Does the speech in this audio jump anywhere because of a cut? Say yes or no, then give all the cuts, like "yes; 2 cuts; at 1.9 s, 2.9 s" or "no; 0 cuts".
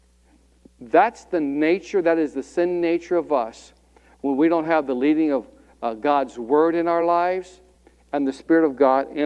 no; 0 cuts